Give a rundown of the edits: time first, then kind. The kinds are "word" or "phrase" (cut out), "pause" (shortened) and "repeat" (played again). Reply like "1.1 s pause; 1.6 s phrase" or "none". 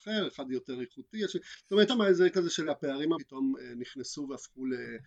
1.9 s word; 2.3 s word; 2.7 s word; 3.1 s word